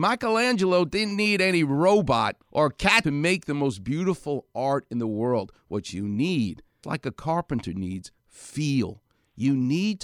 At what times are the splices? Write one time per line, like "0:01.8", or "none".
0:02.4
0:03.0
0:06.8